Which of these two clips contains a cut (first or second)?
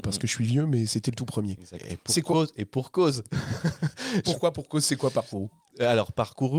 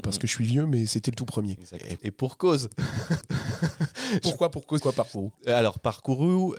second